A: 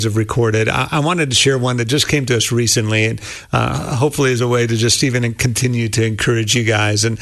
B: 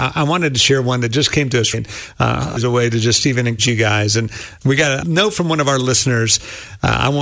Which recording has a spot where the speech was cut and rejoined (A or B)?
B